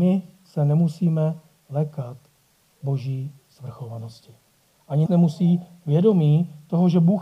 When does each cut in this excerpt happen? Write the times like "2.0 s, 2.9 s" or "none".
5.1 s

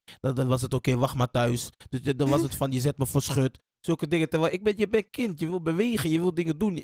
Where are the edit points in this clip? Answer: none

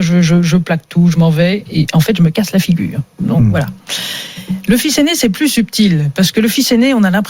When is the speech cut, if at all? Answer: none

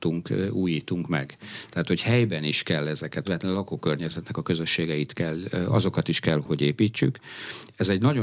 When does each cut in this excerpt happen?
3.3 s

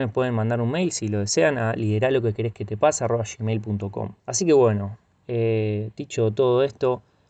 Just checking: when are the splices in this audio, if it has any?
4.2 s

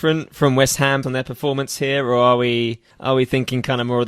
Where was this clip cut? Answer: 1.0 s, 2.9 s

